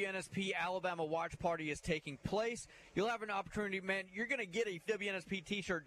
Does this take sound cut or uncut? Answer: cut